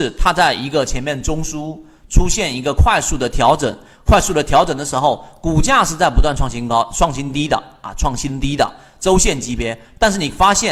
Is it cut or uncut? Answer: uncut